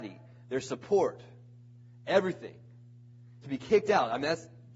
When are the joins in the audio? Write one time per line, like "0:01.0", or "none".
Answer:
0:03.4